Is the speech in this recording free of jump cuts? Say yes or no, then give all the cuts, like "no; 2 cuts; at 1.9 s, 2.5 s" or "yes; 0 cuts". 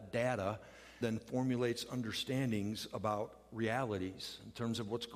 no; 1 cut; at 1.0 s